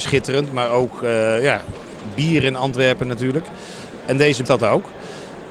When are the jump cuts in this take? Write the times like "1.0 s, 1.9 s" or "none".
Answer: 4.5 s